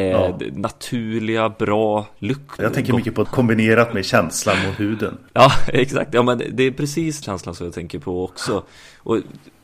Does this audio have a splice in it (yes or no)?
yes